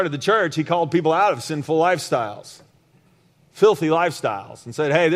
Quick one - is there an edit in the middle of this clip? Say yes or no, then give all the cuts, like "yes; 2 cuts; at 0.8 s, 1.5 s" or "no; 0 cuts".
no; 0 cuts